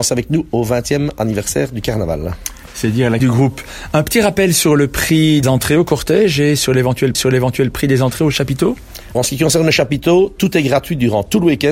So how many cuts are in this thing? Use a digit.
4